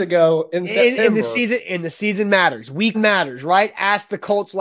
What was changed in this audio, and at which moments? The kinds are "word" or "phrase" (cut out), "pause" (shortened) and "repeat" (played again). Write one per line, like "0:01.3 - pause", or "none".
0:02.9 - word